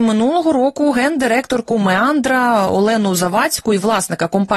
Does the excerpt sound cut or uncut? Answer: uncut